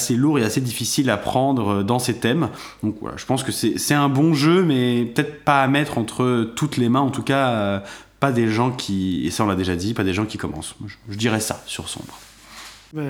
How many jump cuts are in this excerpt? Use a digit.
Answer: 0